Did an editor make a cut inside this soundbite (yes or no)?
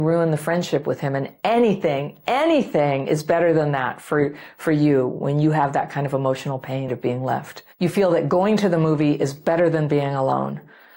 yes